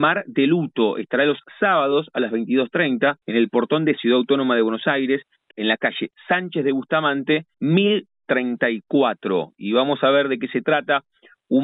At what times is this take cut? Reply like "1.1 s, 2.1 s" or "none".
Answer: 3.2 s, 4.0 s, 5.5 s, 7.5 s